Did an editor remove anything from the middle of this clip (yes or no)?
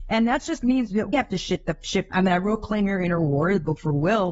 yes